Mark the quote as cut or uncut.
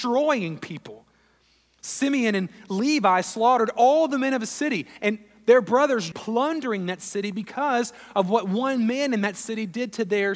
cut